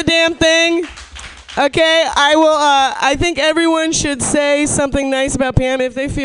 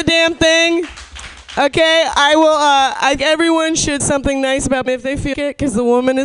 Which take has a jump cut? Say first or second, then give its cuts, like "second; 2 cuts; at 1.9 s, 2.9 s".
second; 4 cuts; at 3.2 s, 4.0 s, 4.9 s, 5.3 s